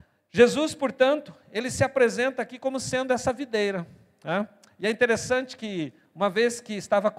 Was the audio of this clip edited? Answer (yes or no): no